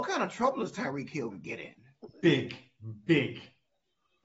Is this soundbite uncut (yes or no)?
no